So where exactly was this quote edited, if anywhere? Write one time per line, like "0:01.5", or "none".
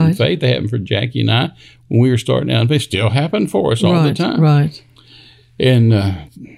none